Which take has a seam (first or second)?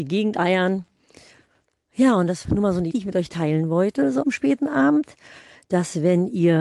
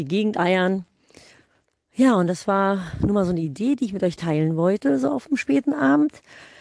first